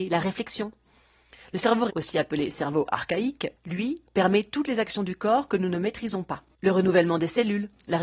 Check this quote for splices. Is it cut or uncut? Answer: cut